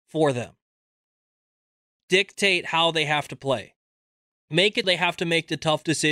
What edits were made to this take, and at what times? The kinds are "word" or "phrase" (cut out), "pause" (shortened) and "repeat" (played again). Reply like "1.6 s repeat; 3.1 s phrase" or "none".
4.8 s word

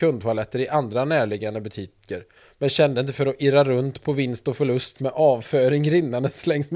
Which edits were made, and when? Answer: none

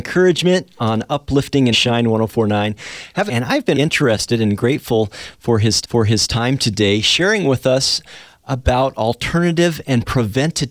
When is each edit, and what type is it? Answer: 1.7 s word; 3.3 s phrase; 3.7 s word; 5.8 s repeat

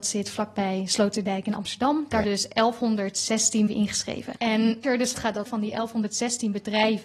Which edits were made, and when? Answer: 2.2 s word; 3.7 s word; 4.8 s word; 5.1 s word; 5.5 s word

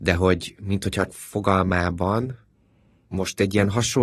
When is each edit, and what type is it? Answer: 1.1 s word

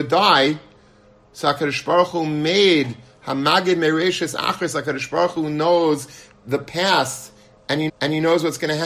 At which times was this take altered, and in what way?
7.9 s repeat

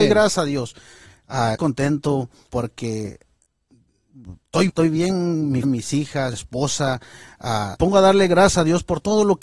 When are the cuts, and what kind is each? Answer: 1.5 s word; 2.5 s word; 4.7 s word; 5.6 s word; 6.3 s word; 7.7 s word

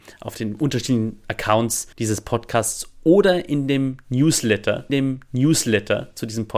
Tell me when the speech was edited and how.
1.9 s pause; 4.9 s repeat

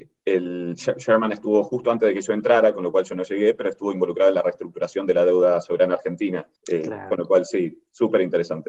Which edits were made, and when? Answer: 6.6 s pause

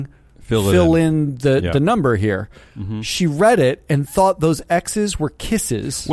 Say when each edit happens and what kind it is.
none

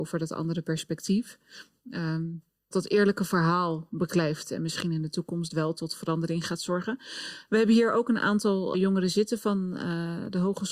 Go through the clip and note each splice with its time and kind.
2.7 s word; 8.7 s word

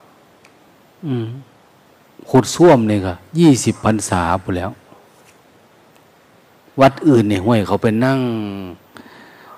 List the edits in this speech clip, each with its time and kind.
none

